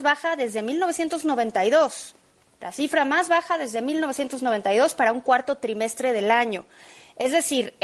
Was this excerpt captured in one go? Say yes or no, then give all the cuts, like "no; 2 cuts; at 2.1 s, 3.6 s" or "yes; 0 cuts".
yes; 0 cuts